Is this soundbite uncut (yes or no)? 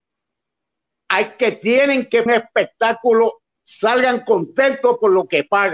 no